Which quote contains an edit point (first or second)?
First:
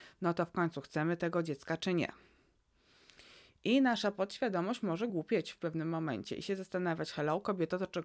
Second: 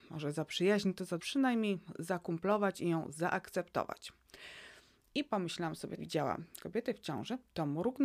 second